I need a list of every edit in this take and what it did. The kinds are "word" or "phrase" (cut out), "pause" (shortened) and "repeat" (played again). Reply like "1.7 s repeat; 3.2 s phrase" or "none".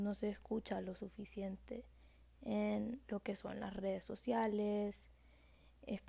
none